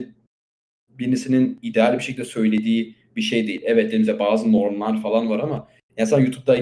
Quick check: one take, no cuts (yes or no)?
yes